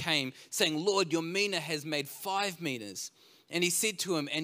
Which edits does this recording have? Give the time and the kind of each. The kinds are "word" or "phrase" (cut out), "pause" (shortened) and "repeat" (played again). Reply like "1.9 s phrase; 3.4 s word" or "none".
none